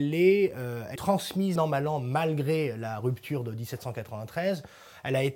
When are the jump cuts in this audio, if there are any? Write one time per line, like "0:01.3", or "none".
0:01.0
0:01.6